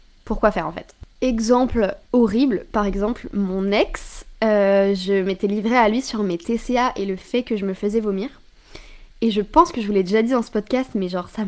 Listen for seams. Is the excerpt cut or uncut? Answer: cut